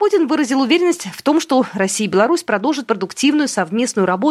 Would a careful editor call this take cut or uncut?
uncut